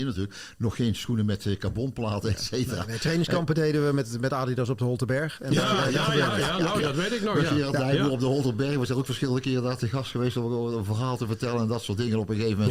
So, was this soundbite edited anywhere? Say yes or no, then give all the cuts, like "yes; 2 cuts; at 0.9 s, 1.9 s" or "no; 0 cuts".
no; 0 cuts